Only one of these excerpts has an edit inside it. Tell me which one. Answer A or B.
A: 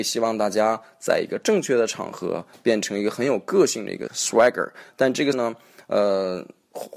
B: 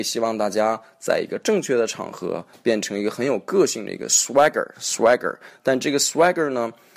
A